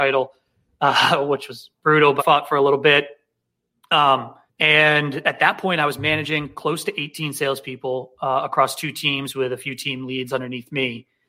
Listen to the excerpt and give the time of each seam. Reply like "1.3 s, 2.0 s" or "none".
2.2 s, 4.5 s